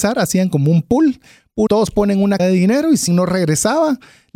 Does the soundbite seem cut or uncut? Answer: cut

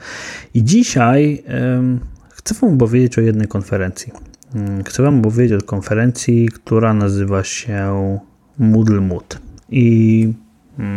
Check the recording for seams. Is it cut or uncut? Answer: uncut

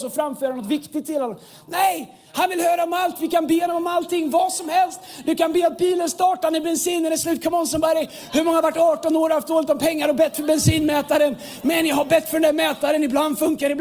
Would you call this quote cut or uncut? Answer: uncut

